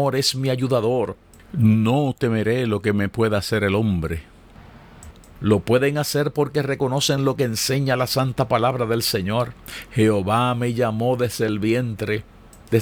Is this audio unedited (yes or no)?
yes